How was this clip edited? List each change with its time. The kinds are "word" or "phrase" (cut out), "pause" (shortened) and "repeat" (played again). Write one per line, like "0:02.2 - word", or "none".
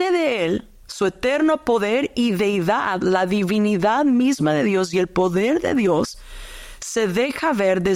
none